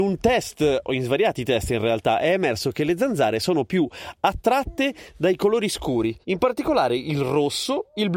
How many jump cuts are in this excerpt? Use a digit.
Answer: 1